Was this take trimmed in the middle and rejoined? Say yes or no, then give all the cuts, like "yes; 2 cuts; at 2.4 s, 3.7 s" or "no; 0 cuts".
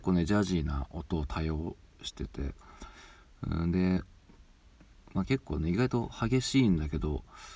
no; 0 cuts